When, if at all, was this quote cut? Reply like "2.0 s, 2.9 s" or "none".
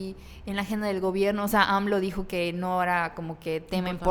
none